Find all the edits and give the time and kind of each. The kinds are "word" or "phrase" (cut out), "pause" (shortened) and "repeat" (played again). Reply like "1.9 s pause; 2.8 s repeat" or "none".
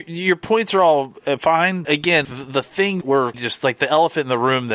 1.8 s word; 2.2 s word; 3.0 s word; 3.3 s word